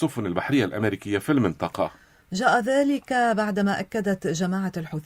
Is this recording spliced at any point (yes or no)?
no